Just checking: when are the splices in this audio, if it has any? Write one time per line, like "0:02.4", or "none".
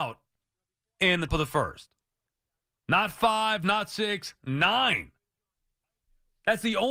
0:01.3

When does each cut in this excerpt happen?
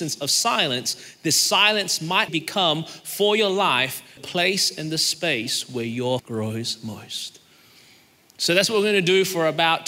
0:02.3
0:04.2
0:06.2

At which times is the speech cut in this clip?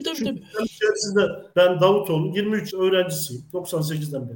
0:01.5
0:02.7

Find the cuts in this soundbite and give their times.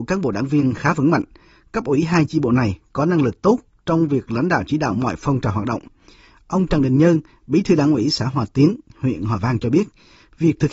none

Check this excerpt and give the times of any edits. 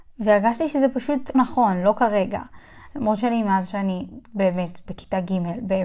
0:01.3
0:03.2
0:04.2

